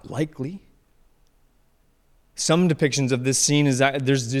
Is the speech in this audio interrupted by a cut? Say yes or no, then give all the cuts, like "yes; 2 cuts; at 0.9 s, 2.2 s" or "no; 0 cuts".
no; 0 cuts